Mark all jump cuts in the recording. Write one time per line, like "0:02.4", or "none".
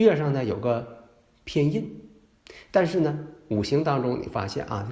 none